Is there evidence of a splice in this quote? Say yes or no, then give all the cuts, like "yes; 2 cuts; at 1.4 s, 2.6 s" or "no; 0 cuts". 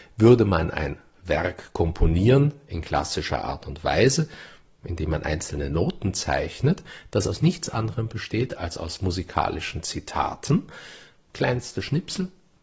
no; 0 cuts